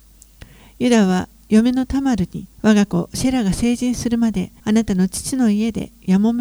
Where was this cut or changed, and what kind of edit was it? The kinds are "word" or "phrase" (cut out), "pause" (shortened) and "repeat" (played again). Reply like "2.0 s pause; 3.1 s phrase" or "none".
2.5 s pause; 4.6 s pause